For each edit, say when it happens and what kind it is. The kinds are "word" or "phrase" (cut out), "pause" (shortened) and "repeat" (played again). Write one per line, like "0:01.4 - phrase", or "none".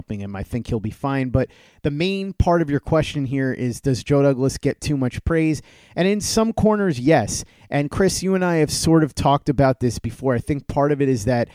none